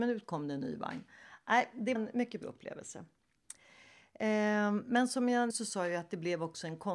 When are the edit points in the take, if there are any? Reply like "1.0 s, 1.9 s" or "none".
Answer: 2.0 s, 2.4 s, 5.5 s